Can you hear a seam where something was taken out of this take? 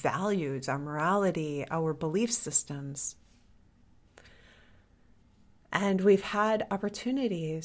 no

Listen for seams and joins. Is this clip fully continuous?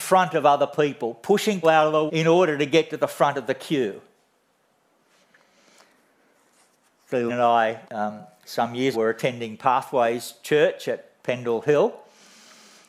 no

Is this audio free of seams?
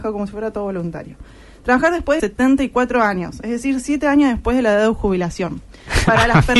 no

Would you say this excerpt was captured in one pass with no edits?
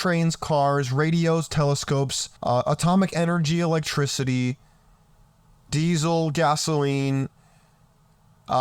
no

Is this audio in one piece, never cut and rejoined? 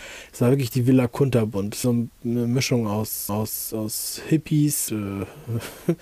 no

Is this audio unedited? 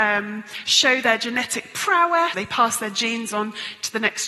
no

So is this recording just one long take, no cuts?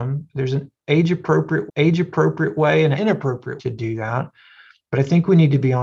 no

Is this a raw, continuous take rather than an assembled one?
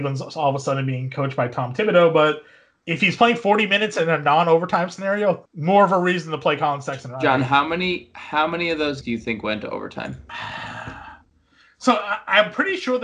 no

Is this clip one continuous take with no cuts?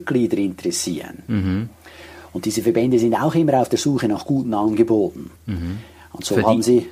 no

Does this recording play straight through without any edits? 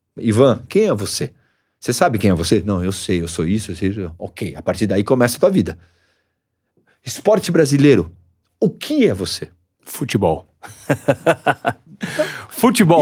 yes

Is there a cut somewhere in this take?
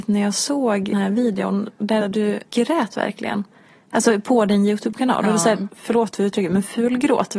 yes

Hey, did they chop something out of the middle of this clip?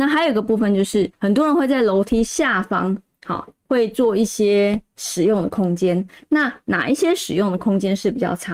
yes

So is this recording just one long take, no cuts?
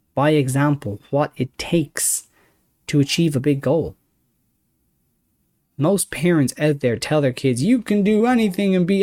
yes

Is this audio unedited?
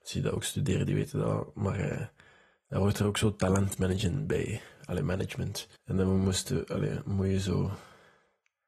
no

